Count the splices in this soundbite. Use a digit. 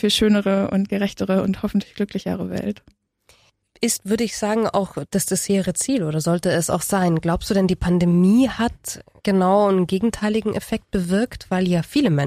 1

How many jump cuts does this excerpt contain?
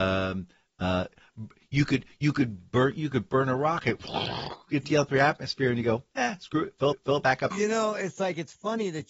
2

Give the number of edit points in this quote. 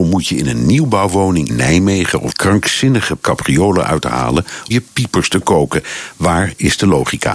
4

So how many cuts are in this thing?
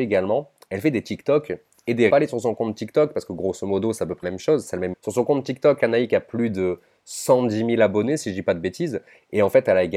3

